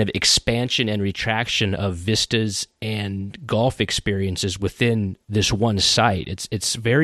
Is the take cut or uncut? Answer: uncut